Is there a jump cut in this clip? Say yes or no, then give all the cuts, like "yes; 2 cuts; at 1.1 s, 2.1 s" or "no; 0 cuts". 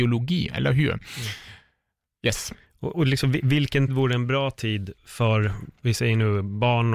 yes; 3 cuts; at 2.9 s, 3.9 s, 5.0 s